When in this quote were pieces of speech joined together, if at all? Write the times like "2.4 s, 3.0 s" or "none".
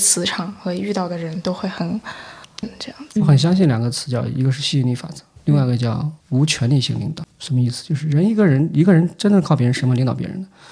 2.6 s, 6.2 s